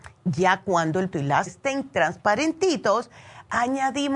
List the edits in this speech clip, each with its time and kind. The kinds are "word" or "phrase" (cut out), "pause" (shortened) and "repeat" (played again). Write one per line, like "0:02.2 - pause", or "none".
0:01.1 - word
0:01.5 - word